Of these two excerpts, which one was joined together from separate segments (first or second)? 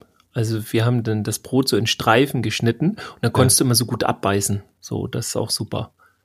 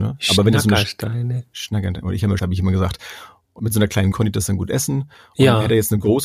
second